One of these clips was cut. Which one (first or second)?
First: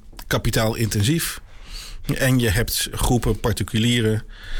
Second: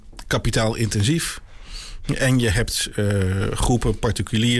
first